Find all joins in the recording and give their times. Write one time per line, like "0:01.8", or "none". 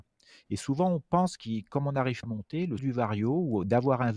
0:02.2
0:02.8